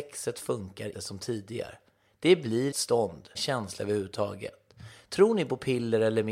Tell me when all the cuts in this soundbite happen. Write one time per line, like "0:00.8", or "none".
0:00.9
0:02.7
0:03.4